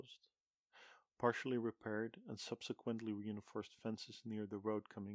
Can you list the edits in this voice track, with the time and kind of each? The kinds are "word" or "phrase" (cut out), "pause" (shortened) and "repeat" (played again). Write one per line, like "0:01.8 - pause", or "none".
none